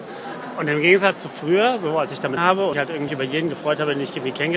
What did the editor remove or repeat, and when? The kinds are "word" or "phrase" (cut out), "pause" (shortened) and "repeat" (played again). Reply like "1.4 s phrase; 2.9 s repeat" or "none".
2.4 s word; 2.7 s word; 3.1 s word